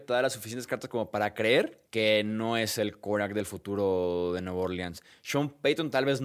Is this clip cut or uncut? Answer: cut